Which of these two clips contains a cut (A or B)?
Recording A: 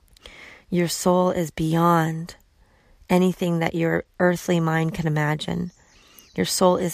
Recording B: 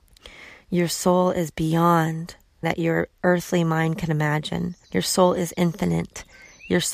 B